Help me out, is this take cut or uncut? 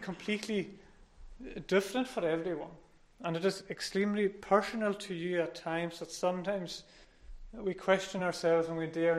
uncut